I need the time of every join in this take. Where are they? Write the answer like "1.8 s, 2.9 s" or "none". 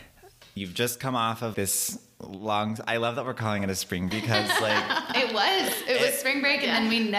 1.5 s, 4.1 s